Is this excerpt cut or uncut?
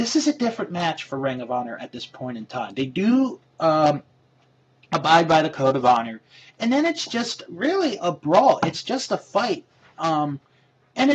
uncut